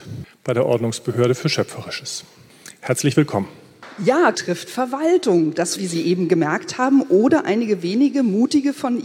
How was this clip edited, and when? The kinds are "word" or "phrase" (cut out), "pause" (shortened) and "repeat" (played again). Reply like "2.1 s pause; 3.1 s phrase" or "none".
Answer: 4.3 s word; 5.8 s word